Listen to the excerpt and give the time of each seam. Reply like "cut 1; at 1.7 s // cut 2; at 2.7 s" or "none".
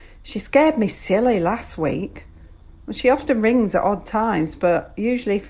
none